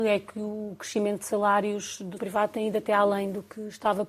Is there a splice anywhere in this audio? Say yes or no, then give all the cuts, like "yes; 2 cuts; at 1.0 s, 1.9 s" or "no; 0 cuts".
yes; 1 cut; at 2.2 s